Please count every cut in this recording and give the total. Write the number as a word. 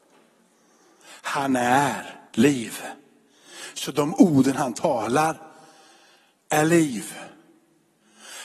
one